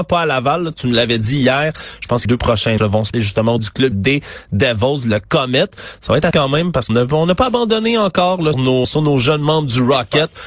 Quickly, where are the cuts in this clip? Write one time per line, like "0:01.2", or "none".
0:02.2
0:02.8
0:03.1
0:03.6
0:03.9
0:06.3
0:06.9
0:08.5
0:08.8